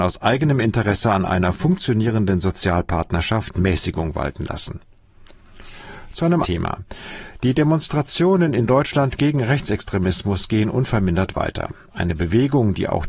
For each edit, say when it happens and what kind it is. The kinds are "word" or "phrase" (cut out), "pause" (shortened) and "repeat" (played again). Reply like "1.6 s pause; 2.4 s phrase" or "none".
6.4 s word